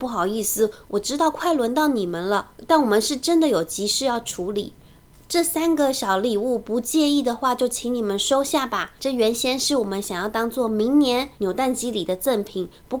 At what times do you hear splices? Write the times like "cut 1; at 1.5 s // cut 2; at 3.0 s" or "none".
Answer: cut 1; at 9.0 s // cut 2; at 11.4 s